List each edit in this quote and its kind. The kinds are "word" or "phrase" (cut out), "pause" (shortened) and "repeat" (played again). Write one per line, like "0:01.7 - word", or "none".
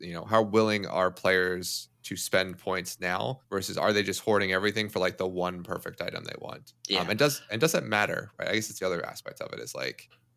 0:01.9 - pause
0:03.4 - pause
0:06.8 - pause

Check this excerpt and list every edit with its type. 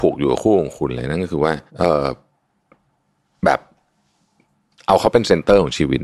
0:01.7 - pause

